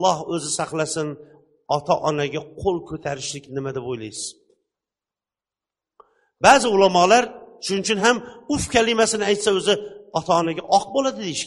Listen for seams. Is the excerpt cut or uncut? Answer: uncut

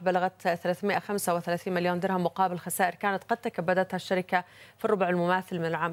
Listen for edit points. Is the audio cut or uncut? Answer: uncut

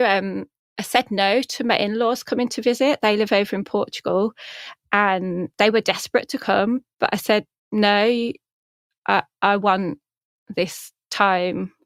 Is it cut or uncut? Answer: uncut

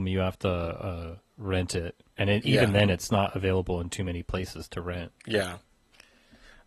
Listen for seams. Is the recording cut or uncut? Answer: cut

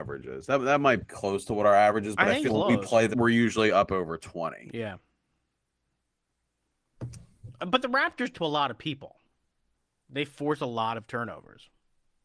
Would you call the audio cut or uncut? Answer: cut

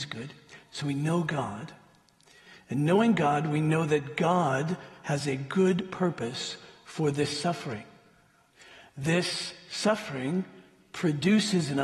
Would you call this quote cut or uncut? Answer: uncut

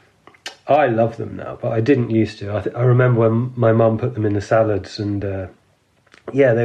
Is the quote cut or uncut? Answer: uncut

